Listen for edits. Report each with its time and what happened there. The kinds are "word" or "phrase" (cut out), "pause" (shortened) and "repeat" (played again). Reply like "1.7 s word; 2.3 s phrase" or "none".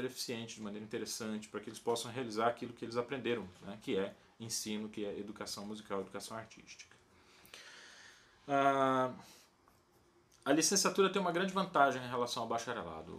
none